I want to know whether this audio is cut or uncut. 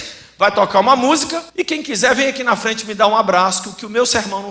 cut